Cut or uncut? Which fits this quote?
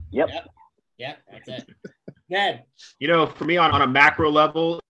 cut